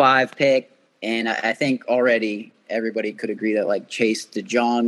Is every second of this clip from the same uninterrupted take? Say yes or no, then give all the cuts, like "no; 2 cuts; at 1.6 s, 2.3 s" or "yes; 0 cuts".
yes; 0 cuts